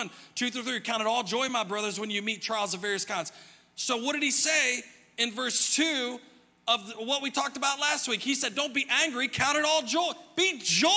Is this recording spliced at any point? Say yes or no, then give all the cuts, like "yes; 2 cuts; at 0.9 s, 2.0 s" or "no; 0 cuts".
no; 0 cuts